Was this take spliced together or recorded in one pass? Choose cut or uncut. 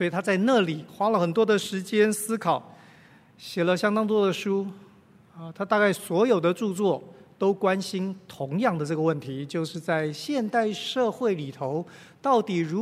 uncut